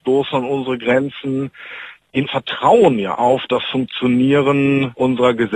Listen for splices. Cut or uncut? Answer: cut